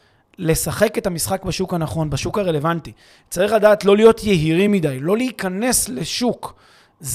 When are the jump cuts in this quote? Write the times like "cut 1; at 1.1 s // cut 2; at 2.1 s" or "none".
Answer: none